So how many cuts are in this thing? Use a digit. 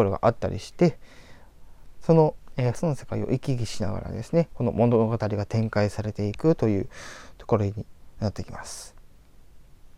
1